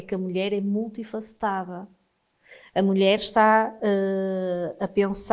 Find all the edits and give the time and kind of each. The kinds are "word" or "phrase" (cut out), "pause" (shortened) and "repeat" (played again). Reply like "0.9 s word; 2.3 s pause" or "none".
none